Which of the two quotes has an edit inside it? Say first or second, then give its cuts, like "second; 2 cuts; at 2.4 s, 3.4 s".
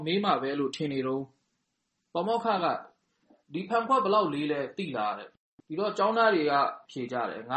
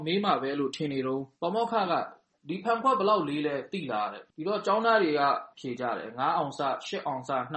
second; 3 cuts; at 1.3 s, 2.3 s, 4.3 s